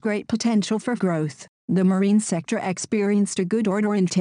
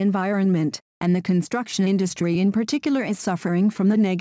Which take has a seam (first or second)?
first